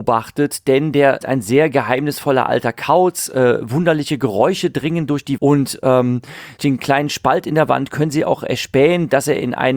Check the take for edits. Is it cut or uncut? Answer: cut